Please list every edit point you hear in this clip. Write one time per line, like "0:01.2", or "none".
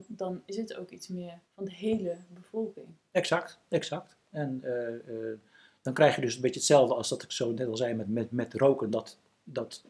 0:01.5